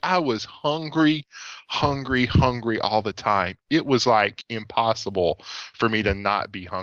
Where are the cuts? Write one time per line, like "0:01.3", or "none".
none